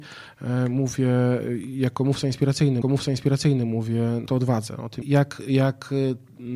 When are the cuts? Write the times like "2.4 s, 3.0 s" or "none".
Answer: 2.8 s, 4.3 s, 5.0 s